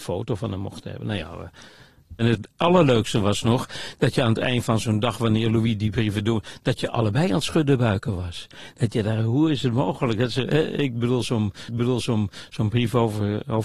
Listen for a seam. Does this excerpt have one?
yes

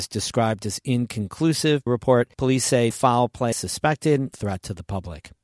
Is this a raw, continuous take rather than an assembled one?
no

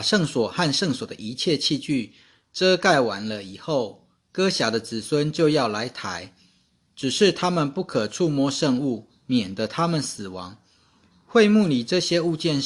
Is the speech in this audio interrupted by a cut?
no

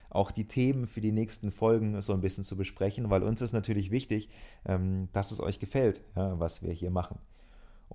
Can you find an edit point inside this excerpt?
no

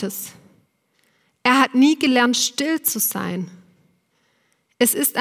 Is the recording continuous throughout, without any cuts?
yes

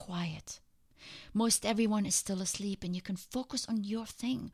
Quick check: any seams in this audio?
no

